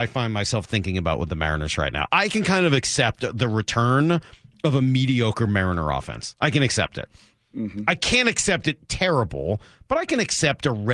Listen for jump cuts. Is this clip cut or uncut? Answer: uncut